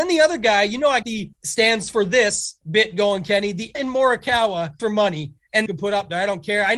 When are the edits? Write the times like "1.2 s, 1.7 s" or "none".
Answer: 1.0 s, 1.3 s, 2.6 s, 3.7 s, 4.8 s, 5.7 s